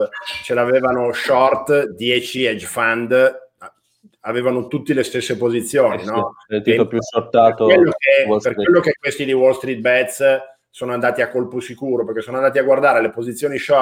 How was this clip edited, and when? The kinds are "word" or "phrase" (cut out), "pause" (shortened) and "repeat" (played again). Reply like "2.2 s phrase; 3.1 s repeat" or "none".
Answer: none